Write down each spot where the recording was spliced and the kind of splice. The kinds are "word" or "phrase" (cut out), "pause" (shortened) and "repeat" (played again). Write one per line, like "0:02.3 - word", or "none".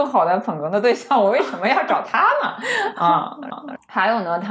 0:03.5 - repeat